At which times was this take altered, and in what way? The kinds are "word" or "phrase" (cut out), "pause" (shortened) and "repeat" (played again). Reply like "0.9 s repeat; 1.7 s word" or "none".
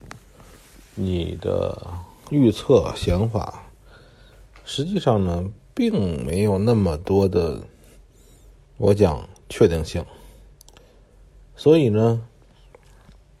none